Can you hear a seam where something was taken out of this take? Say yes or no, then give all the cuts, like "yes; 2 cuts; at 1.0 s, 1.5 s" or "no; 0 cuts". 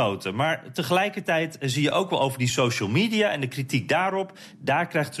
no; 0 cuts